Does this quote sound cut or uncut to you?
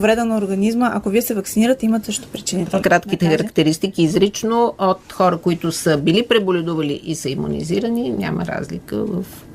cut